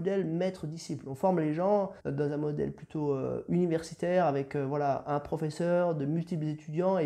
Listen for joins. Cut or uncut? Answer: cut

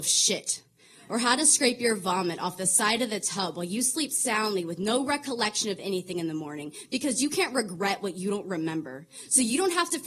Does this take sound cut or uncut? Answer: uncut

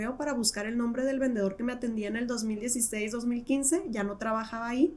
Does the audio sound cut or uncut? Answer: uncut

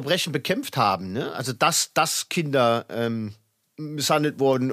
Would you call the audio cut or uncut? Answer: uncut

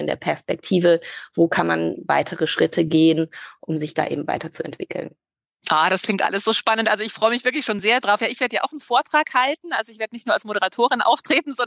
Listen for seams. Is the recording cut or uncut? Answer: uncut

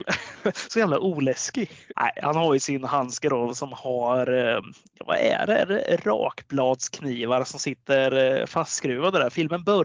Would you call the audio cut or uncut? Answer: uncut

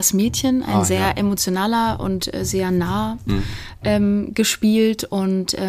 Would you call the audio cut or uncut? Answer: cut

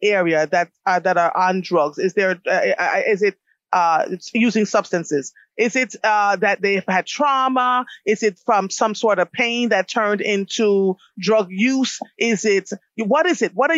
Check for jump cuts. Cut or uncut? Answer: uncut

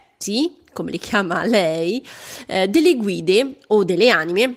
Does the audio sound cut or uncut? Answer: uncut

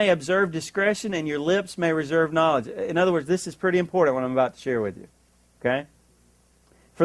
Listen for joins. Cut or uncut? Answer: uncut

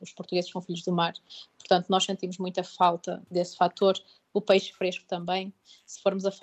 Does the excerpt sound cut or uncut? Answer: uncut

